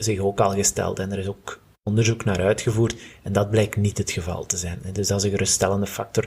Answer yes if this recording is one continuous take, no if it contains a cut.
yes